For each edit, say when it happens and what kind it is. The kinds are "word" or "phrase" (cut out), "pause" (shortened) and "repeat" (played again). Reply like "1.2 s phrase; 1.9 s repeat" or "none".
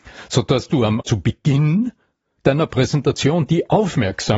1.0 s word